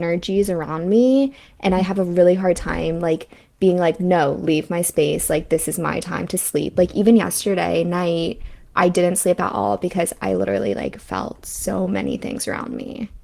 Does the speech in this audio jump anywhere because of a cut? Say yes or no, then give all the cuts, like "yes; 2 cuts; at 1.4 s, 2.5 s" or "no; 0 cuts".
no; 0 cuts